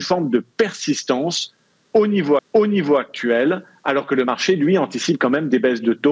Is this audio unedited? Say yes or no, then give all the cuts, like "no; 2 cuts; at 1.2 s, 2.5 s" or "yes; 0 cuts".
no; 1 cut; at 2.4 s